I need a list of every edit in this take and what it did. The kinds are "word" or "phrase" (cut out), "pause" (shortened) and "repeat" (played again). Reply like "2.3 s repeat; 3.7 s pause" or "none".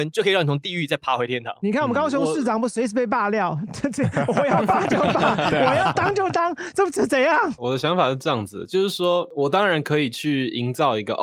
none